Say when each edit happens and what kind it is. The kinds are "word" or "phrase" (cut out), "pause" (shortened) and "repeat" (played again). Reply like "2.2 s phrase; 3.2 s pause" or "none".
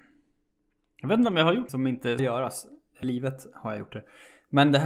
1.7 s word; 2.2 s word; 3.0 s word